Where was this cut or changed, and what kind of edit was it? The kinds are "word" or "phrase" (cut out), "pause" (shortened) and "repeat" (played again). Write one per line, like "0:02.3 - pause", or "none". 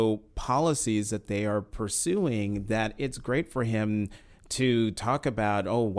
none